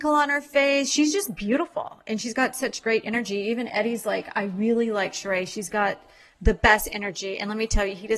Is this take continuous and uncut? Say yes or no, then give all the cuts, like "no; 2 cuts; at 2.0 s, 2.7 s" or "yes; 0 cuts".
yes; 0 cuts